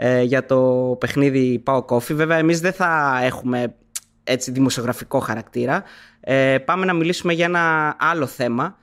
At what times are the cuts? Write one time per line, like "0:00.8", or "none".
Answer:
none